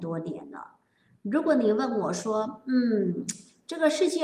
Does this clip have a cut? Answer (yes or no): no